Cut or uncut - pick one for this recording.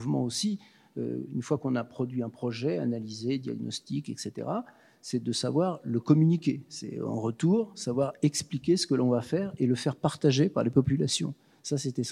uncut